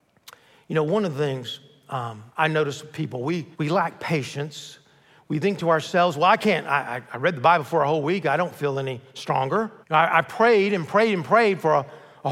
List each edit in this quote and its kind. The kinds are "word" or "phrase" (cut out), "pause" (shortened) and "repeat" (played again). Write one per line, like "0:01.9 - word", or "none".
0:02.3 - pause
0:03.5 - pause
0:09.8 - pause